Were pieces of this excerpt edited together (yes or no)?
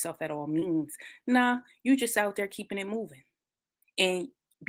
no